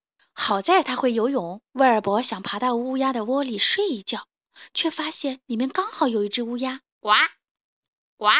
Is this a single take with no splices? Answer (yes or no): no